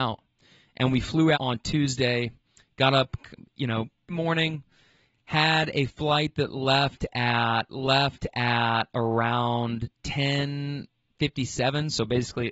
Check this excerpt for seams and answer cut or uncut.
cut